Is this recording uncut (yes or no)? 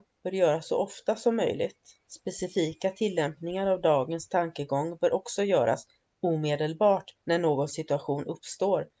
no